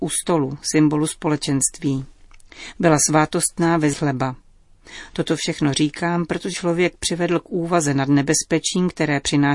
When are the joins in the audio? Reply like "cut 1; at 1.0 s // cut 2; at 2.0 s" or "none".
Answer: cut 1; at 3.9 s // cut 2; at 6.5 s